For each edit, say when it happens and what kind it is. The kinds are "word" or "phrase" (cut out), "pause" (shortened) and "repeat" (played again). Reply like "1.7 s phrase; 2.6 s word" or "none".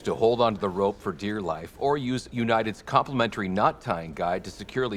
none